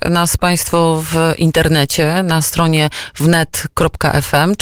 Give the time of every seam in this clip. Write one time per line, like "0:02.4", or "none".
none